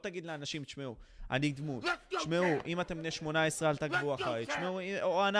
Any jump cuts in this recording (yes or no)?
no